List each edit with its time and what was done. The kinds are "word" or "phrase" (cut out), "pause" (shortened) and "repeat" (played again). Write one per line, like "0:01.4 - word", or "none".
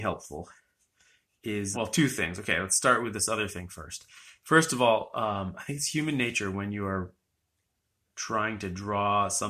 0:01.7 - word